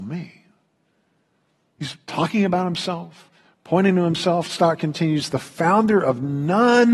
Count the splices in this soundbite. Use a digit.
0